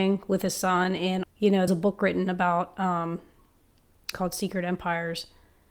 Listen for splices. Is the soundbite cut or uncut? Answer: cut